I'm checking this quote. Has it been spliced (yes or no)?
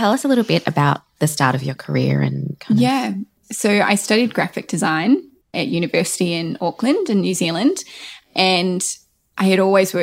no